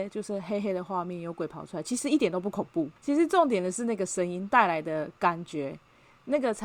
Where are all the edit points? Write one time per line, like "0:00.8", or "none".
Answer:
0:03.0